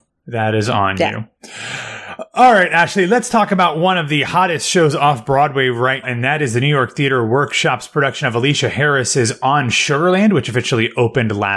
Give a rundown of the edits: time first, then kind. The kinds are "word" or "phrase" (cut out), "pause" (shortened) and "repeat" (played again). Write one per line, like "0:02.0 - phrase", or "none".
0:06.0 - word